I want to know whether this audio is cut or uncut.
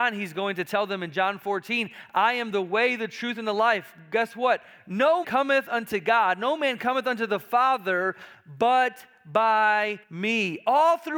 cut